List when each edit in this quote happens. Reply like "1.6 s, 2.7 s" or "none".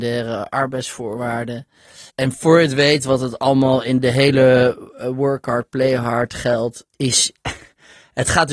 2.1 s, 6.9 s